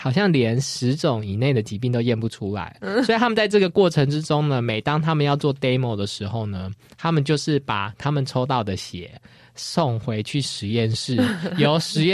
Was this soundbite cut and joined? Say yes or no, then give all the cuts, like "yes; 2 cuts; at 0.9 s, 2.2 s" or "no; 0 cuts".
no; 0 cuts